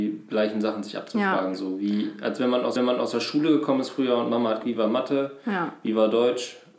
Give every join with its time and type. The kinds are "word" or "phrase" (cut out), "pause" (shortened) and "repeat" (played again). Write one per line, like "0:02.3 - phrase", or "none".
0:02.8 - repeat
0:04.6 - word